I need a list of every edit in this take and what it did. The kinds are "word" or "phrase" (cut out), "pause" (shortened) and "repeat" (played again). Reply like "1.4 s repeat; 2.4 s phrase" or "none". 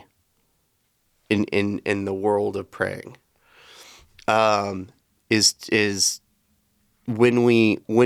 none